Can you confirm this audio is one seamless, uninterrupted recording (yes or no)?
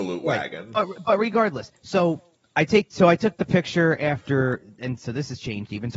yes